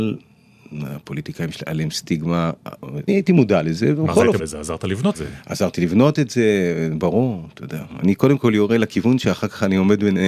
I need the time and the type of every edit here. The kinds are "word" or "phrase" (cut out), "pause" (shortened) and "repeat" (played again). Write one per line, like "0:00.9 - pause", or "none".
0:03.1 - word
0:04.4 - word
0:05.1 - word